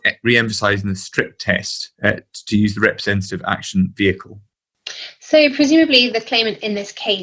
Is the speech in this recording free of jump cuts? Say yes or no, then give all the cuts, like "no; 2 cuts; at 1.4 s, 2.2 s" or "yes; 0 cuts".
no; 1 cut; at 1.9 s